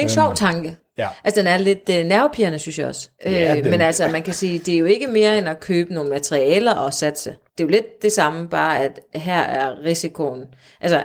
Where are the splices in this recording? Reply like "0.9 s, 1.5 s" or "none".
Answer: 3.1 s, 7.5 s